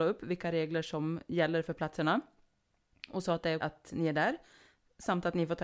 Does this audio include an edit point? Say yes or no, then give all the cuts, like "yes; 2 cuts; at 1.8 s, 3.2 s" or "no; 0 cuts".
yes; 1 cut; at 3.6 s